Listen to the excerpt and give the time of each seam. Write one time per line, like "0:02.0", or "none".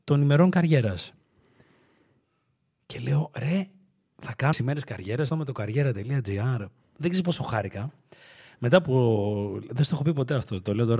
0:04.5
0:05.3